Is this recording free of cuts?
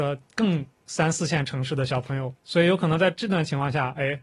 no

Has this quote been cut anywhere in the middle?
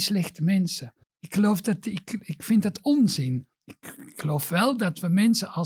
yes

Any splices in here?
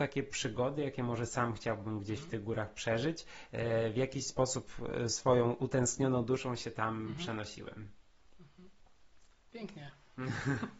no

